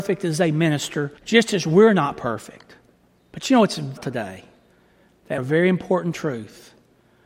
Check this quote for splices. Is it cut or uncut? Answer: cut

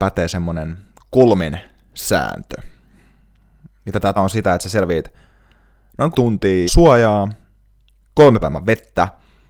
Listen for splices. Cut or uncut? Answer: cut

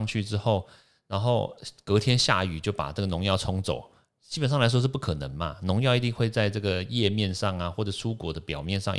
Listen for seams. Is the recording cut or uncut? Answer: uncut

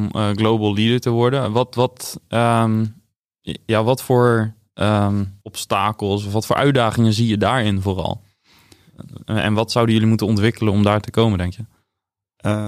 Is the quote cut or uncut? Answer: cut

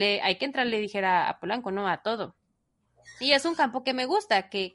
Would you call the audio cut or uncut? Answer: uncut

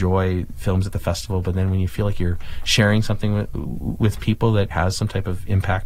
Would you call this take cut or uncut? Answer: cut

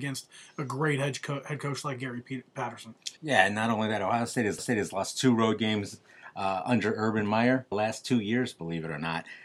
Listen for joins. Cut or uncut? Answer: cut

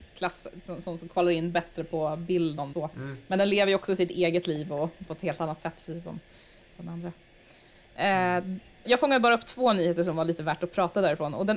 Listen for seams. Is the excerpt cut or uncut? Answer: cut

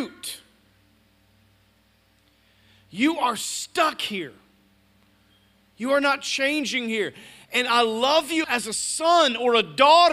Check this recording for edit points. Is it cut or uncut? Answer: cut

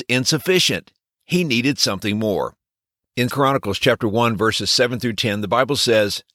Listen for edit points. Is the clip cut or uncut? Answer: cut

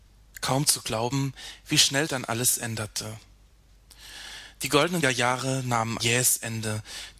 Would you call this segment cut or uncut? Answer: cut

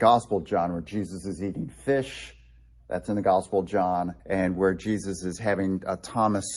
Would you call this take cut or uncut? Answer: cut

